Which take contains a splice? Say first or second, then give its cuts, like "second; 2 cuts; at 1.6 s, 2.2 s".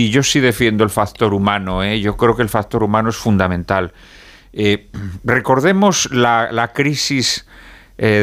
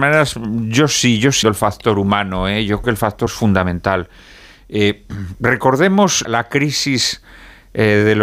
second; 4 cuts; at 1.4 s, 2.8 s, 3.3 s, 6.2 s